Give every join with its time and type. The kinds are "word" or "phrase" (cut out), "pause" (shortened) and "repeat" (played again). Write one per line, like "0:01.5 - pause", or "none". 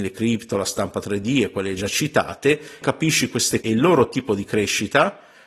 0:02.8 - phrase
0:03.6 - word